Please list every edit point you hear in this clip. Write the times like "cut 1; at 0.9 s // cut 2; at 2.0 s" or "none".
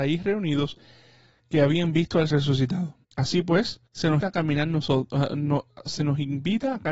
cut 1; at 2.3 s // cut 2; at 3.0 s // cut 3; at 3.9 s // cut 4; at 4.2 s